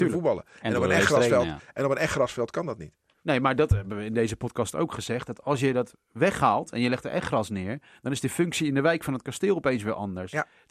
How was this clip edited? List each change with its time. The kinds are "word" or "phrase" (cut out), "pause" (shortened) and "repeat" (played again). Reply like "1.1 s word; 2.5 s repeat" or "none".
none